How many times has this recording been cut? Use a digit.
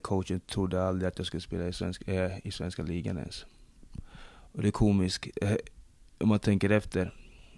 0